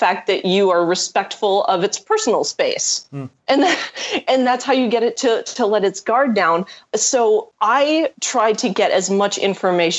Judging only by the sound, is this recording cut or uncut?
cut